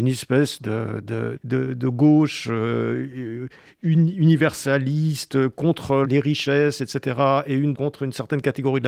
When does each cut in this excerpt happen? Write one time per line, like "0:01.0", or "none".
0:01.4
0:06.0
0:07.7

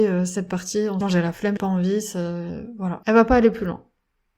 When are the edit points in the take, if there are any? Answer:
0:01.0
0:01.6

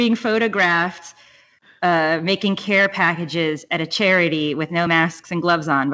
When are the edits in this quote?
none

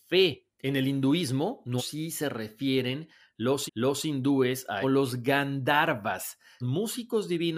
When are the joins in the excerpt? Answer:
0:01.8
0:03.7
0:04.8
0:06.6

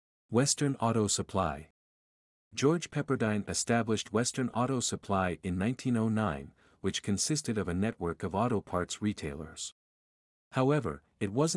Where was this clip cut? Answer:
none

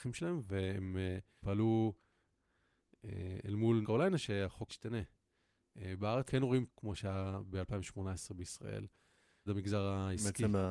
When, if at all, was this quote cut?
0:01.4
0:03.8
0:04.7
0:06.3
0:06.7
0:09.5

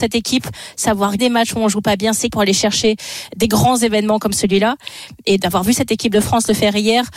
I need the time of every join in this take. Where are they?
0:01.2
0:02.3
0:05.4

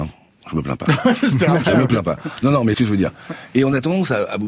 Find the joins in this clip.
0:02.7

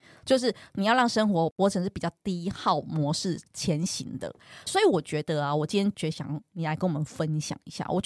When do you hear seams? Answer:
0:04.7

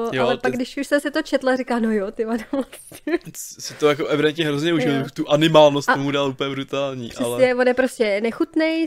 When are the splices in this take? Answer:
none

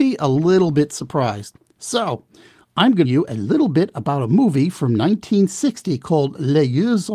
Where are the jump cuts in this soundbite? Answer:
0:03.0

